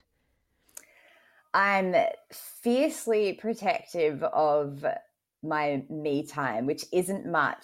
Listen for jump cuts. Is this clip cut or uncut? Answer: uncut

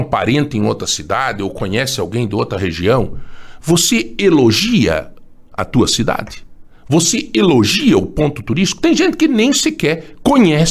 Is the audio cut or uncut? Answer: uncut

